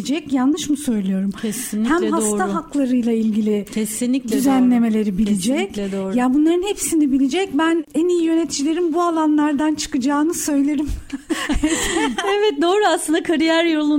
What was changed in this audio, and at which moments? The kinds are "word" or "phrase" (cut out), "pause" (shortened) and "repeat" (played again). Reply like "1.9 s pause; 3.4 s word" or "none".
none

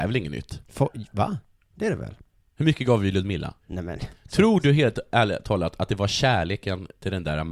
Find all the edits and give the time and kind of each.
3.6 s pause

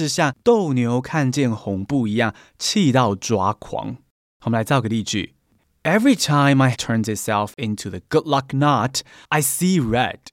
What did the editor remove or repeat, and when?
6.7 s word

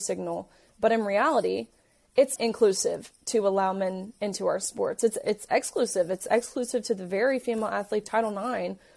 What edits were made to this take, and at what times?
2.4 s word; 8.0 s word

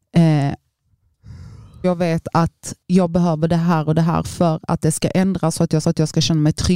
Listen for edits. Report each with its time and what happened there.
1.8 s word; 2.8 s pause; 5.8 s repeat

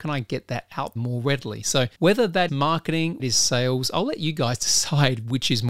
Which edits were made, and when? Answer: 1.0 s word; 1.9 s pause; 2.5 s word; 3.2 s phrase

